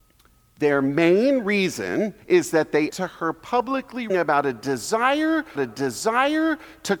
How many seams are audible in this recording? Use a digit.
4